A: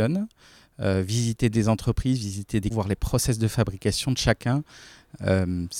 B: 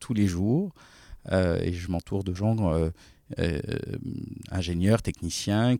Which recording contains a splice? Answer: A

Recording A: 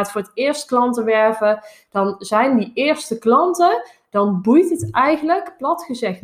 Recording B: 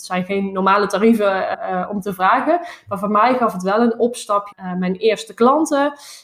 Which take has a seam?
B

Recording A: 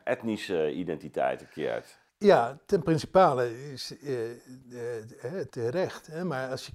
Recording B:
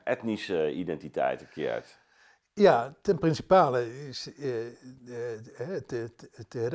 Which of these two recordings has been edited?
A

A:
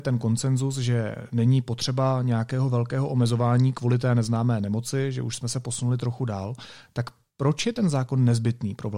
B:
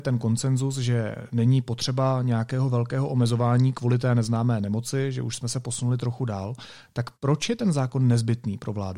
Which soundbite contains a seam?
B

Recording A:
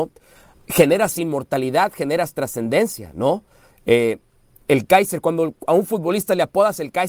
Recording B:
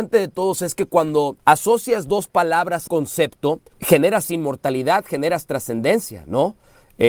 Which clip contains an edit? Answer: B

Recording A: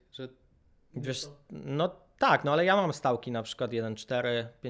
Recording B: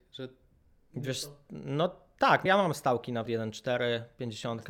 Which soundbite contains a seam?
B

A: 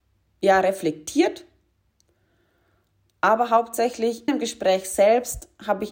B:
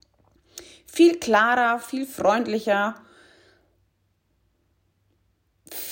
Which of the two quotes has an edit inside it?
A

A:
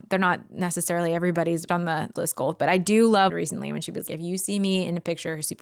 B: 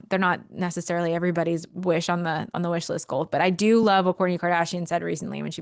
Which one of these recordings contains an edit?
A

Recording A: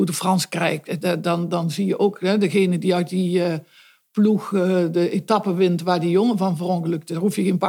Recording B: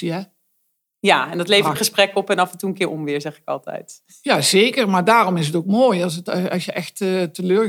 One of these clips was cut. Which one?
B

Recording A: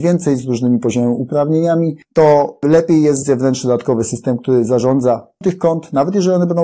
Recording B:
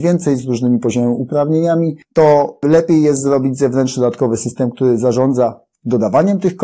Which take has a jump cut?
A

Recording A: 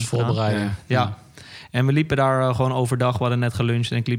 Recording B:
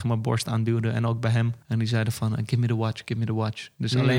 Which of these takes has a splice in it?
B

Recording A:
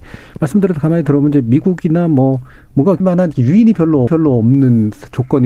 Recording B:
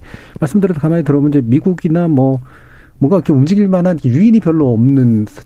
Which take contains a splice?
A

